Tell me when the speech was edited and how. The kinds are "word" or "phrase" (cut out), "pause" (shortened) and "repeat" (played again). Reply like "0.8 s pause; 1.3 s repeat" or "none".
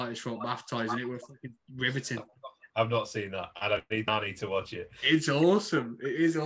2.7 s pause